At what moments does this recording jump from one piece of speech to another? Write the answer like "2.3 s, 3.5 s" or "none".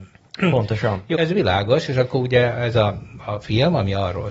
1.1 s